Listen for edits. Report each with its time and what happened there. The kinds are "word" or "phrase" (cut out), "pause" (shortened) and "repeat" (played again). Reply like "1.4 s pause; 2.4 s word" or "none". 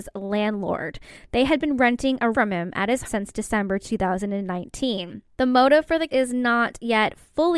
2.3 s word; 3.0 s word; 5.3 s pause; 6.1 s word